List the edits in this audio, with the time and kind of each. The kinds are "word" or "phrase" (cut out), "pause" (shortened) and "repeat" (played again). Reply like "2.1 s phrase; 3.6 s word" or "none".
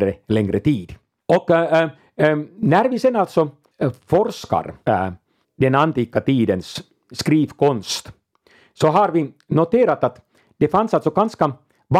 none